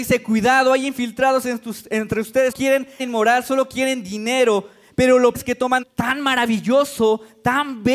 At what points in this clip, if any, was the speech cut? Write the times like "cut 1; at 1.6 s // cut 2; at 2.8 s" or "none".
cut 1; at 2.5 s // cut 2; at 3.0 s // cut 3; at 5.3 s // cut 4; at 5.8 s